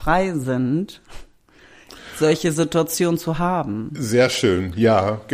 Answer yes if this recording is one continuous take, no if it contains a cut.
yes